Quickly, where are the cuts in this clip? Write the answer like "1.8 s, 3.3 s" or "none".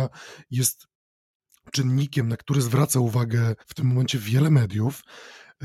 3.6 s